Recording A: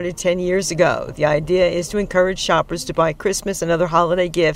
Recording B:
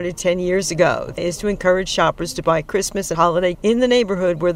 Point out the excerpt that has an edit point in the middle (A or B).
B